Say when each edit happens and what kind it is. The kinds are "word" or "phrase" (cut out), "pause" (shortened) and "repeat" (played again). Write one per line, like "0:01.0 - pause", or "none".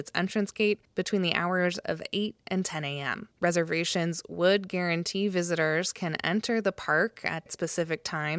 0:03.3 - pause